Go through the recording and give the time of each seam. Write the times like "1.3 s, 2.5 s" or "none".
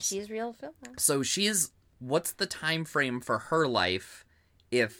none